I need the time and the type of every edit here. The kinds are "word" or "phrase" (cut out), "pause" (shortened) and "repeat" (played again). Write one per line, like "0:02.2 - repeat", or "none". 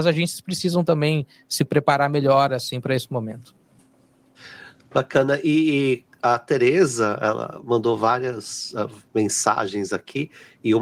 none